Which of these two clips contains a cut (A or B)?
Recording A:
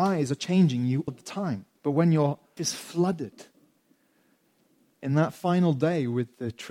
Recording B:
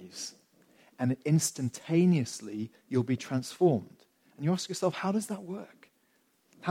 A